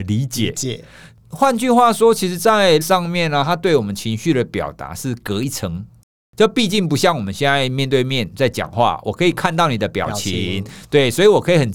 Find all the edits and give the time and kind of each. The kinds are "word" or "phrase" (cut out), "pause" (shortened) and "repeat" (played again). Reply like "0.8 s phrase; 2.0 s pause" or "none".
2.8 s word